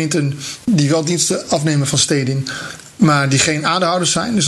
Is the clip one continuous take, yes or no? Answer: yes